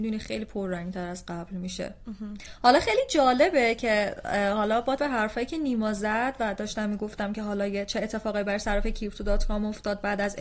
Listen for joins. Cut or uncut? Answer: cut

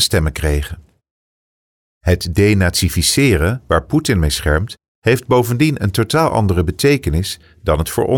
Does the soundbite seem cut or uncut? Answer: uncut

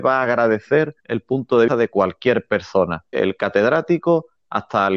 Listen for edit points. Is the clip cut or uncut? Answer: cut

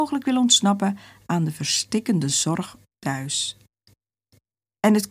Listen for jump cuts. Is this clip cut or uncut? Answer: uncut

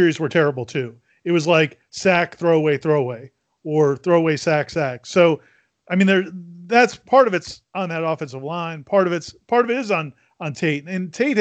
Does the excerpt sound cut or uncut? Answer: uncut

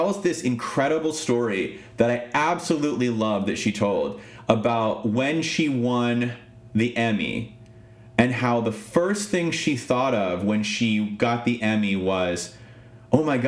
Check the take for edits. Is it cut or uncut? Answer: uncut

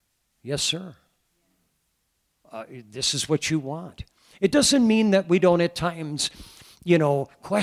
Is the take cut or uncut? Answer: uncut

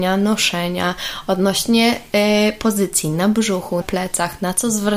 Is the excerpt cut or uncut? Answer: cut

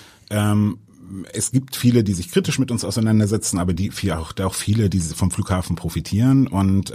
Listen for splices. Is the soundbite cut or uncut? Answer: uncut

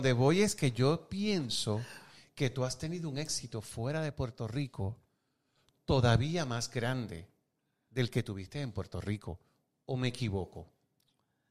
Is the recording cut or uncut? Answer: uncut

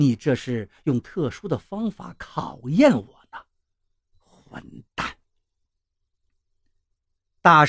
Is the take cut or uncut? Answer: uncut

